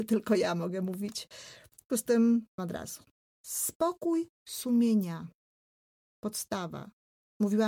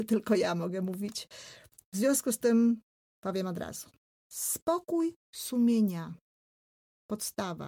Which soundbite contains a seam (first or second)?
first